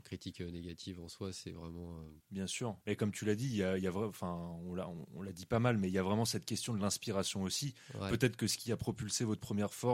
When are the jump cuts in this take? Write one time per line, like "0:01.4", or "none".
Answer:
0:02.2
0:02.8